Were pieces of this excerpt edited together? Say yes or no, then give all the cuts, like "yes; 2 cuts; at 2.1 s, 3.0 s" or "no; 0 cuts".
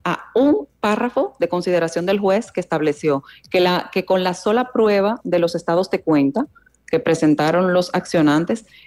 no; 0 cuts